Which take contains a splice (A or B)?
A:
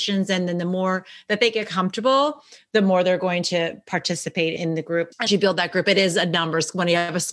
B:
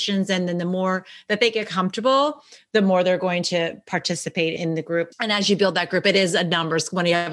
A